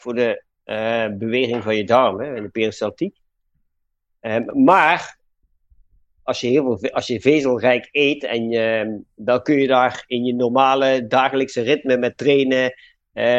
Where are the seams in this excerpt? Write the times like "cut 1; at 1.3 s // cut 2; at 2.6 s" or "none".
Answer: none